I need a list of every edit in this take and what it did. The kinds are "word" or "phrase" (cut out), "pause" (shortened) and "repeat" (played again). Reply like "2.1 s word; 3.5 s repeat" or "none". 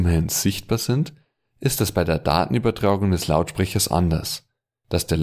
none